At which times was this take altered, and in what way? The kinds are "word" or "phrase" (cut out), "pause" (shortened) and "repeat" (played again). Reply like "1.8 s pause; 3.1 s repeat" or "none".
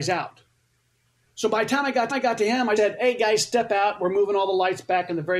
2.1 s repeat; 2.8 s word